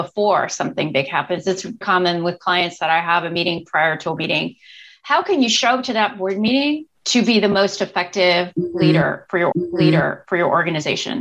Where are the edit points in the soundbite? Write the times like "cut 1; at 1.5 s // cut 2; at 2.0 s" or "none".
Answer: cut 1; at 1.8 s // cut 2; at 4.2 s // cut 3; at 6.9 s // cut 4; at 9.5 s